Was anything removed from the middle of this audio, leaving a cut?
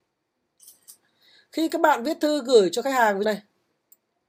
yes; 1 cut; at 3.2 s

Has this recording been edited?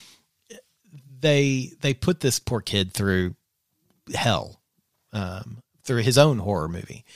no; 0 cuts

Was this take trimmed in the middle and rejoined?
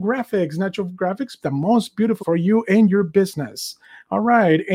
yes; 3 cuts; at 1.4 s, 2.2 s, 3.8 s

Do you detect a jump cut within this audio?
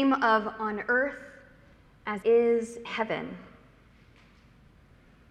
yes; 2 cuts; at 2.2 s, 2.8 s

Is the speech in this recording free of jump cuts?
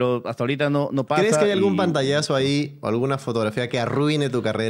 yes; 0 cuts

